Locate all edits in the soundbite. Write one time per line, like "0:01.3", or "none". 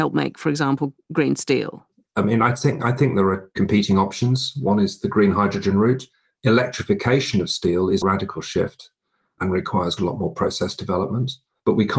0:08.0
0:09.4
0:10.0